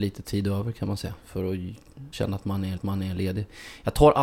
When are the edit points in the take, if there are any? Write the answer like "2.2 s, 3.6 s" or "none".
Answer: 1.2 s, 2.1 s, 2.8 s